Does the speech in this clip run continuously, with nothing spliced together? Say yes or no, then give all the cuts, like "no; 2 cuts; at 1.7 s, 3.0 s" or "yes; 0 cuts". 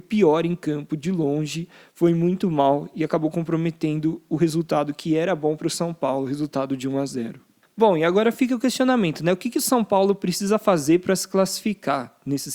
yes; 0 cuts